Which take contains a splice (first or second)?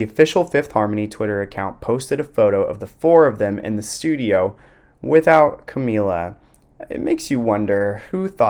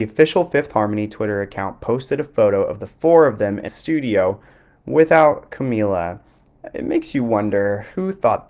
second